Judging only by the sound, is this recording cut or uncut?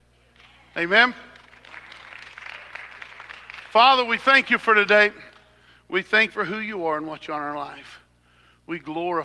cut